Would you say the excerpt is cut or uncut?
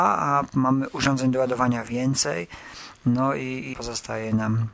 cut